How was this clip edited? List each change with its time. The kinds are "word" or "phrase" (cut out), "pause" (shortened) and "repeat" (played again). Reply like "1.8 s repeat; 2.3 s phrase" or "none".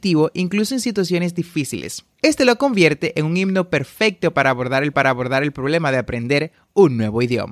2.1 s pause; 4.9 s repeat